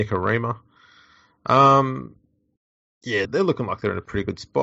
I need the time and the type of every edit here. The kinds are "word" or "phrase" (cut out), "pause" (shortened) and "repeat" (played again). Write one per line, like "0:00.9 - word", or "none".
0:03.2 - word